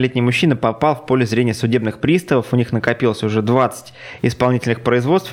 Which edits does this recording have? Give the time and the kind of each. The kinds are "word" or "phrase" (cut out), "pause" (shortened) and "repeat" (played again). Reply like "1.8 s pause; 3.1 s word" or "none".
none